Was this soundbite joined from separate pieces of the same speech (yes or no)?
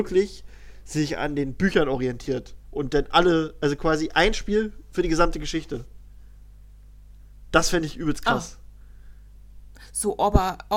no